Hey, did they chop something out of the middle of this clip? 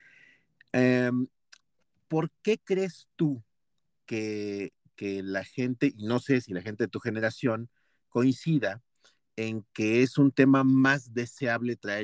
no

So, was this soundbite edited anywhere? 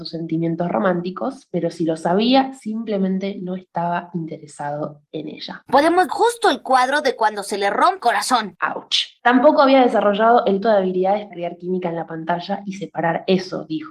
yes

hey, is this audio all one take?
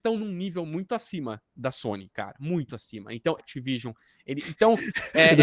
no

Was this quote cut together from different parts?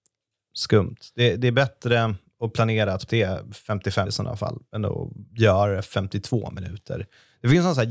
yes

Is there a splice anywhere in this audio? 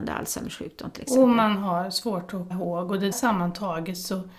yes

